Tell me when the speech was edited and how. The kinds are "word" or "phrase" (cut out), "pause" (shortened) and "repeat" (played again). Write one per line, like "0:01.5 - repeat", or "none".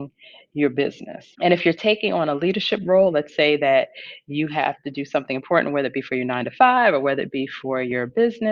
0:01.3 - pause